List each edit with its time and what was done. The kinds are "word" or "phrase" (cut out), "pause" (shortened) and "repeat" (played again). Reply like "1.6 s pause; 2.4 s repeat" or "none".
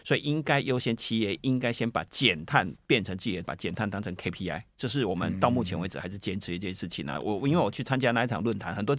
3.4 s word